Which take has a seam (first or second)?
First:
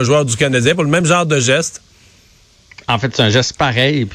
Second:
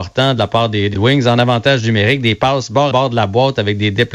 second